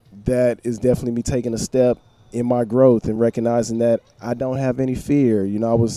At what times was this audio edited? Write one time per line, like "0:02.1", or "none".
none